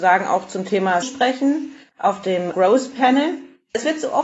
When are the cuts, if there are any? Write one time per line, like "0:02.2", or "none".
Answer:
0:01.0
0:02.5